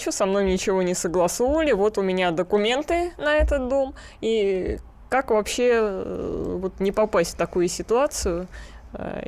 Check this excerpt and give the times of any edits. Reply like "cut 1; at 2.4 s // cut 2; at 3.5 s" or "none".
none

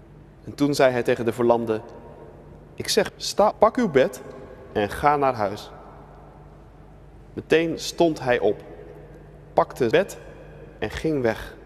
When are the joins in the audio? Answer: cut 1; at 3.1 s // cut 2; at 3.5 s // cut 3; at 9.9 s

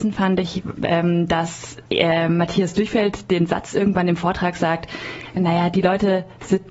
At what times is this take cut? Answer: cut 1; at 1.9 s // cut 2; at 5.4 s

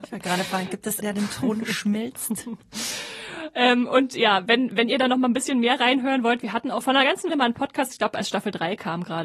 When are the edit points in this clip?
cut 1; at 1.0 s // cut 2; at 6.8 s // cut 3; at 7.3 s

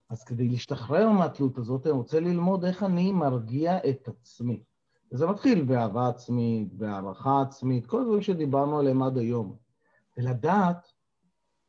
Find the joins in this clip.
none

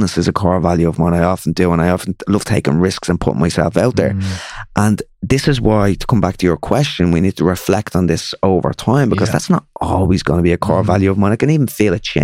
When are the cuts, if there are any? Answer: none

